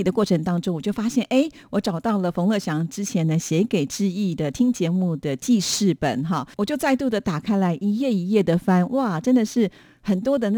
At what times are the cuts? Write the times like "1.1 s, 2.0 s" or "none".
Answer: 6.5 s